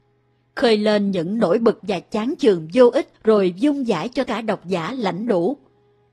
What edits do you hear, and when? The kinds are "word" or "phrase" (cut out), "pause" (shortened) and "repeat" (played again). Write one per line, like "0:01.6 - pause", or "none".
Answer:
0:01.8 - word
0:03.2 - pause
0:04.3 - word